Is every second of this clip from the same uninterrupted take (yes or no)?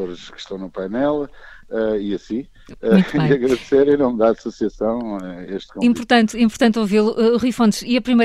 yes